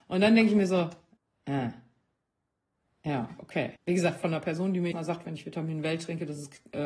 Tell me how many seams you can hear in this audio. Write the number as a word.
three